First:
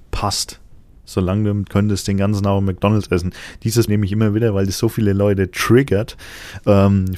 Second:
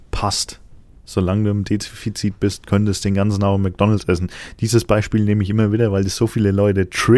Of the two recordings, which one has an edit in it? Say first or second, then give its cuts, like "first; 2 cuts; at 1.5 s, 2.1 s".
first; 2 cuts; at 1.6 s, 3.9 s